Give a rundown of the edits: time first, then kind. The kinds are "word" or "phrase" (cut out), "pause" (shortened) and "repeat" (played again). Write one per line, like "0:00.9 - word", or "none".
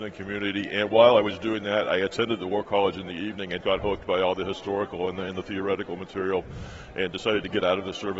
0:03.6 - word